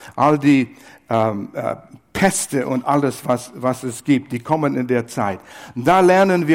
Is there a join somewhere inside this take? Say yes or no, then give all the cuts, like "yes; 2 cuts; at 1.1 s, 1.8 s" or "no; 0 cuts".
no; 0 cuts